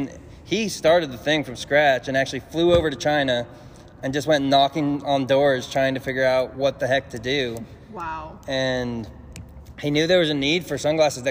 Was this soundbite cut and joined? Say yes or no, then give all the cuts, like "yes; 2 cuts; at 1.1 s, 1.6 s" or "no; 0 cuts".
no; 0 cuts